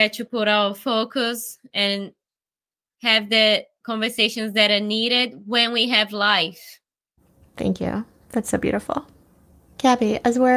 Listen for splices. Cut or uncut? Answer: uncut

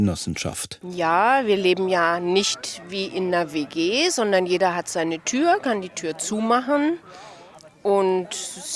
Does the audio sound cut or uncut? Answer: uncut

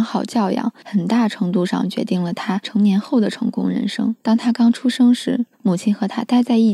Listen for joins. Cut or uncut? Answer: cut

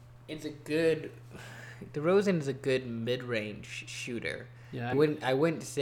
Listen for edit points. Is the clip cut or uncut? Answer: cut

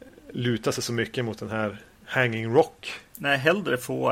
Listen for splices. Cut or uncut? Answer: uncut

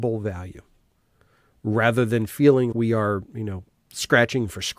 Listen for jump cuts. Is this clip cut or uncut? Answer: cut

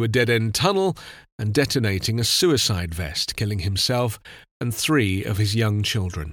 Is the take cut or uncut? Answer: uncut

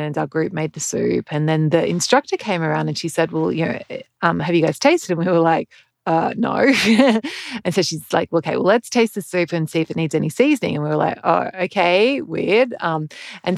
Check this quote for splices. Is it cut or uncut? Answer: uncut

